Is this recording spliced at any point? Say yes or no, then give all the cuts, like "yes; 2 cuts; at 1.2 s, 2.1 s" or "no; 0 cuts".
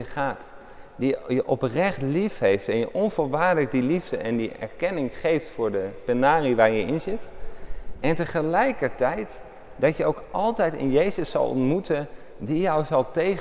no; 0 cuts